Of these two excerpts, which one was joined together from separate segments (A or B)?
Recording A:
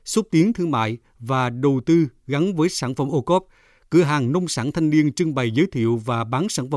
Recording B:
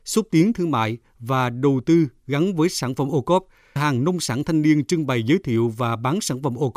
B